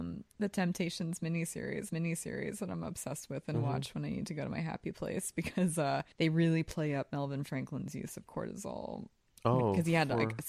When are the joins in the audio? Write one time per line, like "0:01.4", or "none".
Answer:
0:01.9
0:06.1